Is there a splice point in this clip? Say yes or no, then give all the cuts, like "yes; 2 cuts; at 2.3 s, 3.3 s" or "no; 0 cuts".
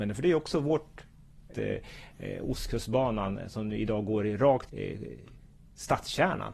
yes; 2 cuts; at 1.5 s, 4.7 s